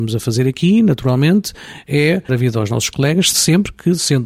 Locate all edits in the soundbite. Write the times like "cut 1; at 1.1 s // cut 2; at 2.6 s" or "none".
cut 1; at 2.3 s // cut 2; at 3.3 s

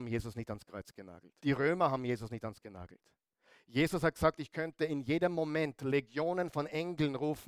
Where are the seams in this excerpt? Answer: cut 1; at 1.4 s // cut 2; at 2.6 s

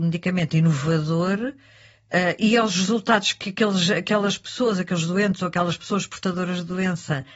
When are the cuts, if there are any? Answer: none

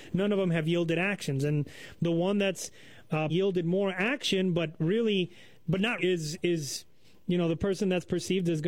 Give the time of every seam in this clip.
cut 1; at 3.3 s // cut 2; at 6.0 s

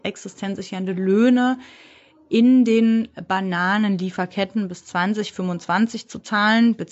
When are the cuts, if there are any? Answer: none

